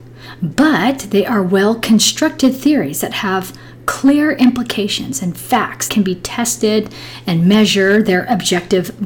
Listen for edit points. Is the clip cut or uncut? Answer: cut